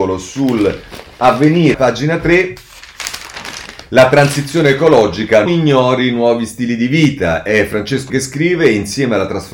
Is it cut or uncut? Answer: cut